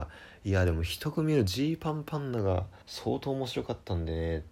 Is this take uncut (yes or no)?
no